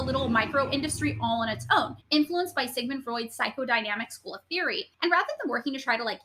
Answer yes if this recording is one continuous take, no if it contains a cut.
no